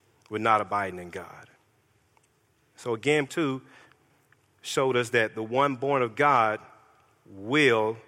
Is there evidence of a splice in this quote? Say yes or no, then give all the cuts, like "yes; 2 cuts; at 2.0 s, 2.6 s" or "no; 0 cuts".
yes; 1 cut; at 3.3 s